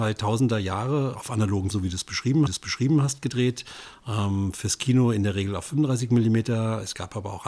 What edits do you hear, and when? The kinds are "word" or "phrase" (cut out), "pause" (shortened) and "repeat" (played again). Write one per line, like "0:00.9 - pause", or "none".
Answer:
0:01.1 - word
0:01.7 - word
0:02.5 - repeat

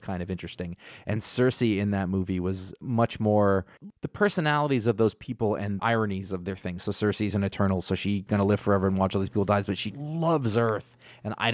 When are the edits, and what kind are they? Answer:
0:04.0 - pause
0:05.8 - word
0:08.3 - word
0:09.9 - word

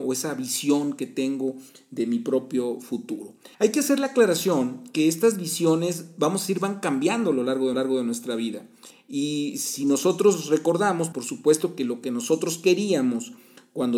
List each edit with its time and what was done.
0:03.5 - pause
0:07.7 - repeat
0:11.1 - word

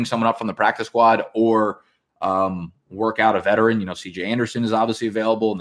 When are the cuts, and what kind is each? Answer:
none

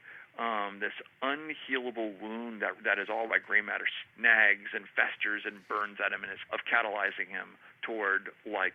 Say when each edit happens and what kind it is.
0:02.8 - word
0:03.3 - word
0:04.1 - word
0:06.5 - word

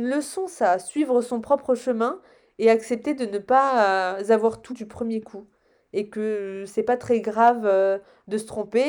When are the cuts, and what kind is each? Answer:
0:04.7 - word

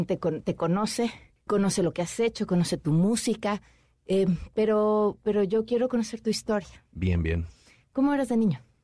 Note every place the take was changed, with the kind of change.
0:01.5 - word

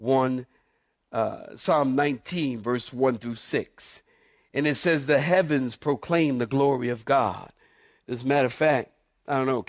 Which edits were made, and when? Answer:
none

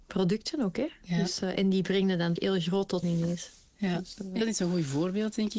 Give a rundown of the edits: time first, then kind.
0:02.4 - word
0:03.0 - word
0:04.4 - word

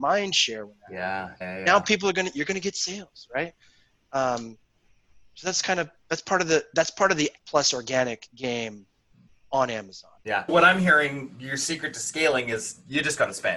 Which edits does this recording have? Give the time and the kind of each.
0:01.4 - word
0:07.4 - word
0:10.2 - word
0:10.5 - word

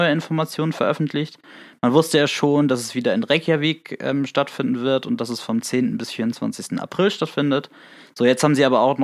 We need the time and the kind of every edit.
none

